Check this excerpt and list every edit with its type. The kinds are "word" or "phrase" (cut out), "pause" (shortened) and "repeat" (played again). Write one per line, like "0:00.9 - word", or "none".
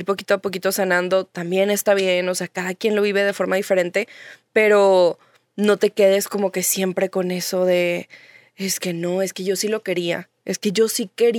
none